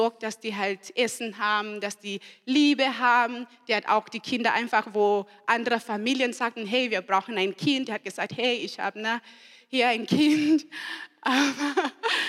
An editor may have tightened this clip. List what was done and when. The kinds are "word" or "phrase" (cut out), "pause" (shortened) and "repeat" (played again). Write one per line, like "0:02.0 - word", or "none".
none